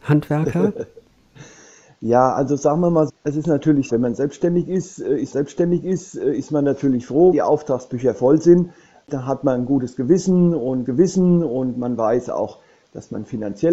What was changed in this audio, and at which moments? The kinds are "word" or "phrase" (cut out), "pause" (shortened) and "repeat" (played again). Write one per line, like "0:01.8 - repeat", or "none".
0:03.1 - word
0:03.9 - phrase
0:05.3 - repeat
0:07.3 - word
0:10.8 - repeat